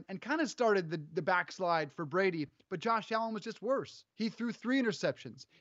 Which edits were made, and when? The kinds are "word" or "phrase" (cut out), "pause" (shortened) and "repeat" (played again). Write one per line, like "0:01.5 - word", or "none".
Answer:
0:04.1 - pause